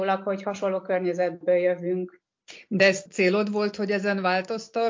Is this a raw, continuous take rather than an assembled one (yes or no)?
yes